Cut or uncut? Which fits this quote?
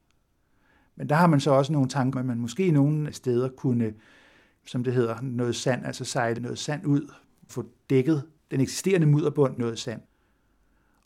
cut